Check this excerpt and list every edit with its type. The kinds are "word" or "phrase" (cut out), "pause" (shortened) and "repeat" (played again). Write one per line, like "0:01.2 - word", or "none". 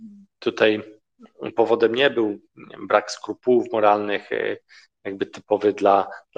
none